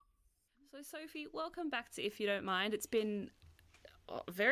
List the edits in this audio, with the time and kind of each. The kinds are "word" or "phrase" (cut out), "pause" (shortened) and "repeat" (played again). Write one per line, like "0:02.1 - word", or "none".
none